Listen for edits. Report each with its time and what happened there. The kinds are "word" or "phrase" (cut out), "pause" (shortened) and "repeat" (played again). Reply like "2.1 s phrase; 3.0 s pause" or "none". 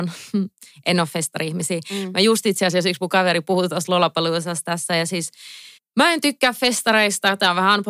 5.8 s pause